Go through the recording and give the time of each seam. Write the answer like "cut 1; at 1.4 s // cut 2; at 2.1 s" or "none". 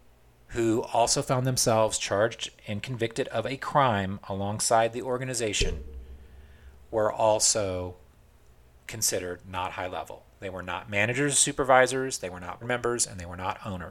cut 1; at 12.6 s